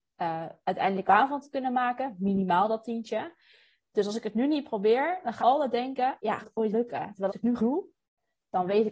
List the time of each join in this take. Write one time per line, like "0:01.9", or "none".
0:01.1
0:05.4
0:06.4
0:06.7
0:07.3
0:07.6